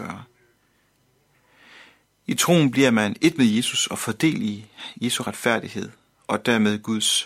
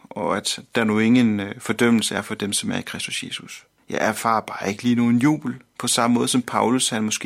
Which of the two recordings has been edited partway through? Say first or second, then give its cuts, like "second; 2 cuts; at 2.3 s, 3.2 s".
second; 1 cut; at 3.8 s